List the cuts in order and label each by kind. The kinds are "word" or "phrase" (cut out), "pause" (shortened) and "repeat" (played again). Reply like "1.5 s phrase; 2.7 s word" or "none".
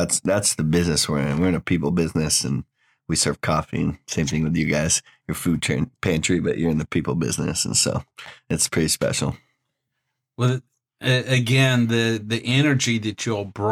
none